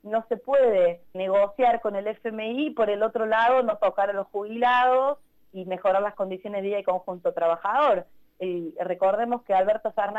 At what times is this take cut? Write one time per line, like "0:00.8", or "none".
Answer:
0:01.1
0:08.8

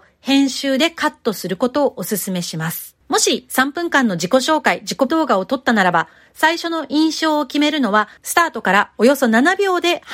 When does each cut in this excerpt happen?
0:03.0
0:05.1
0:08.2

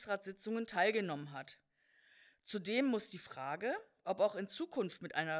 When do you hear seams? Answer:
none

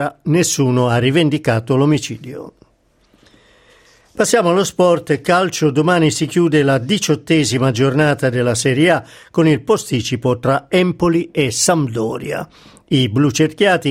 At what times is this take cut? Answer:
none

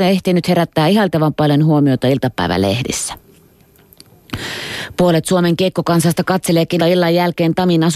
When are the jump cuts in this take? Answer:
0:06.8

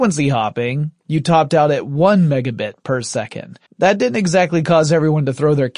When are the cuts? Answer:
0:03.7

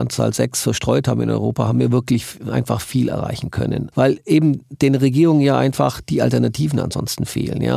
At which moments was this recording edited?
none

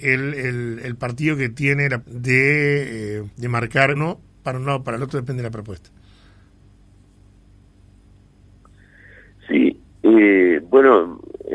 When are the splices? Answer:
0:02.0
0:03.3
0:04.0

